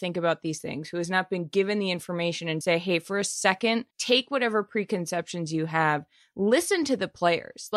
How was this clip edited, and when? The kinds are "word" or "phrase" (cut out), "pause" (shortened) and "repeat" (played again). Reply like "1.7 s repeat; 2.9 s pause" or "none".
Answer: 2.6 s word; 3.9 s pause